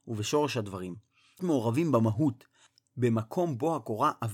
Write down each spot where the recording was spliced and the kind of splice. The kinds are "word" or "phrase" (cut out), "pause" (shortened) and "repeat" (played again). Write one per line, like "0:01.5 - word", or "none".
0:01.4 - word